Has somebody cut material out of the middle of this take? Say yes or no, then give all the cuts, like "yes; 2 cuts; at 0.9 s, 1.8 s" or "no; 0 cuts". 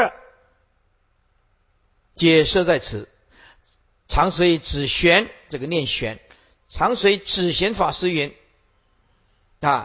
no; 0 cuts